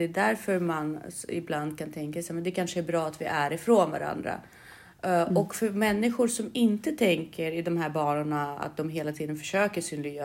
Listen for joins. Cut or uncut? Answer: uncut